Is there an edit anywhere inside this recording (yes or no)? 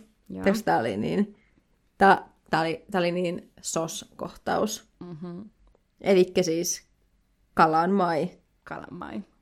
no